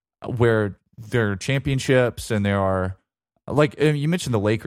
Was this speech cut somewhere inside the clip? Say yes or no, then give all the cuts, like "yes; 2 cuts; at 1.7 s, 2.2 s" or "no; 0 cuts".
no; 0 cuts